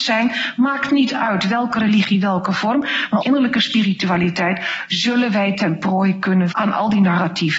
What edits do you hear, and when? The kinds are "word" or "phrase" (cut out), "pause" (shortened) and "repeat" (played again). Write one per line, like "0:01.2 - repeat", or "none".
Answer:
0:03.2 - word
0:06.5 - word

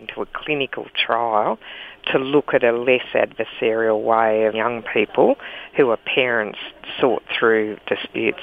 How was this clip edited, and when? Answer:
0:04.5 - word

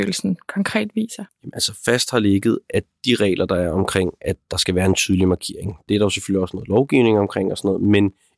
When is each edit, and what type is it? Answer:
0:01.3 - pause

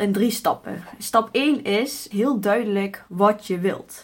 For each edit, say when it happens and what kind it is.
0:02.1 - word

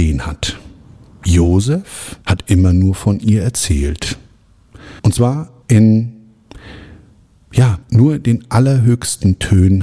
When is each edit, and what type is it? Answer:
0:02.2 - pause
0:05.0 - pause
0:05.6 - pause
0:07.8 - pause

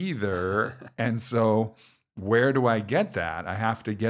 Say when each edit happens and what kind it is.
none

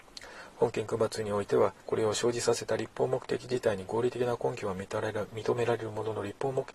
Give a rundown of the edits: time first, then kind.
0:01.8 - pause

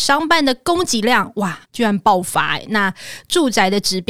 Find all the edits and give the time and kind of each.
0:01.6 - pause

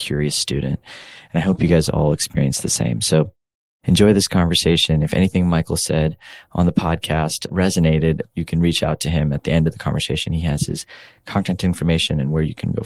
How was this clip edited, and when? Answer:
none

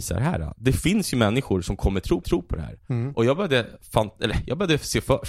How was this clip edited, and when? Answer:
0:02.2 - repeat

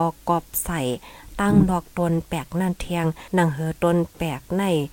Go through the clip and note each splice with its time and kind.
0:03.3 - pause

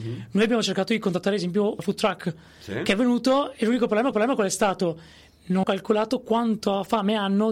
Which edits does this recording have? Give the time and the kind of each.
0:01.8 - word
0:04.1 - repeat
0:05.6 - word

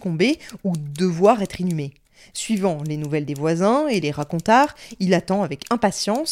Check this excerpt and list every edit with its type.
none

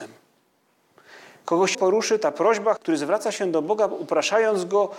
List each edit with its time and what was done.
0:01.7 - word
0:02.8 - word

